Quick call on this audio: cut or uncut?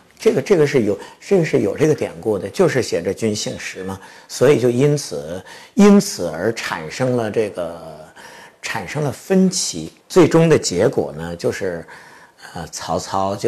cut